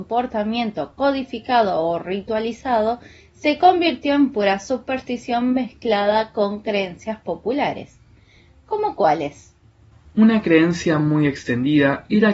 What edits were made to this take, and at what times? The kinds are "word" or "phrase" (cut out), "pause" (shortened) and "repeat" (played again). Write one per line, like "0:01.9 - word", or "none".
none